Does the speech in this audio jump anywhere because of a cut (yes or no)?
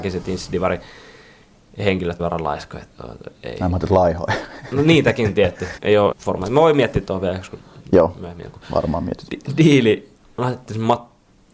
yes